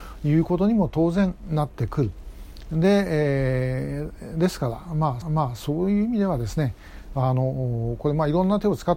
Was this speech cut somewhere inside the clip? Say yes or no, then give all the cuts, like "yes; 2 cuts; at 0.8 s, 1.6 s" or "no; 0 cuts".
yes; 1 cut; at 5.2 s